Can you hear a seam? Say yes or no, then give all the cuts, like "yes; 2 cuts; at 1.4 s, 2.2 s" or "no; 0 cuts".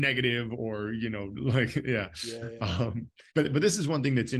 yes; 1 cut; at 3.3 s